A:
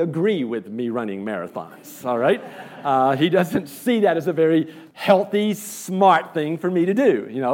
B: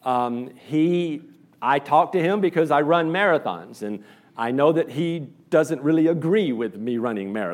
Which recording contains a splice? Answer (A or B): A